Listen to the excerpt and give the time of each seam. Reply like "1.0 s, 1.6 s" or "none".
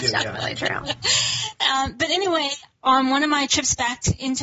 none

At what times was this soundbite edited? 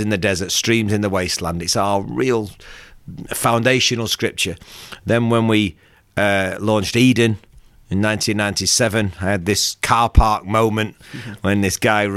none

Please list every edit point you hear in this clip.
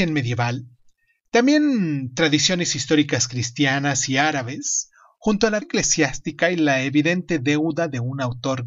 5.6 s

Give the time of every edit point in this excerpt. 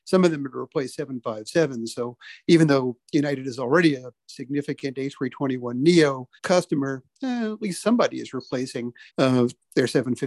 6.4 s, 9.1 s

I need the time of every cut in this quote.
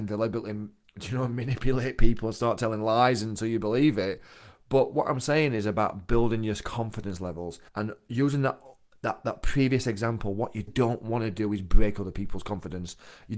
7.7 s, 10.7 s

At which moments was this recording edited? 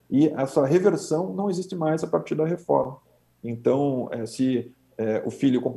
none

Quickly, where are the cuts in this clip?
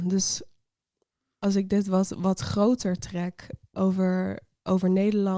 none

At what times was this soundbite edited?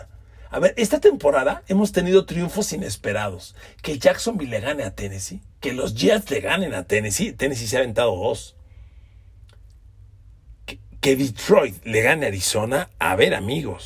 5.5 s

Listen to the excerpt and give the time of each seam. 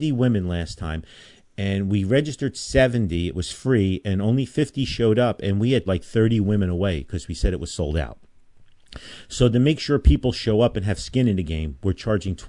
5.9 s

